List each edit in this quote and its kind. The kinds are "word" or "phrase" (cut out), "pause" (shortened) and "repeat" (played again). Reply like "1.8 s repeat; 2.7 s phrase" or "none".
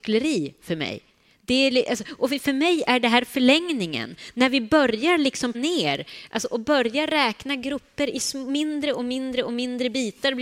5.5 s word